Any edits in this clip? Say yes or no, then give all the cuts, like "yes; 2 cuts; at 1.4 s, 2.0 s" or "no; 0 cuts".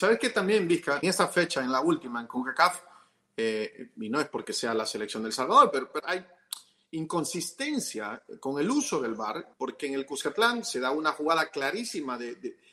yes; 3 cuts; at 1.0 s, 6.0 s, 9.5 s